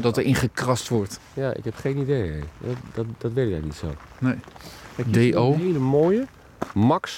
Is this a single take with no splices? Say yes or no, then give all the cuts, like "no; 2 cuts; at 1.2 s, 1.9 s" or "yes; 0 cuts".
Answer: yes; 0 cuts